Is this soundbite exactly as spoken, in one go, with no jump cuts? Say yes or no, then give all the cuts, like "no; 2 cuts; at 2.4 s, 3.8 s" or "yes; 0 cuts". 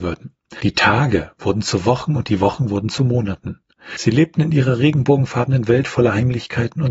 yes; 0 cuts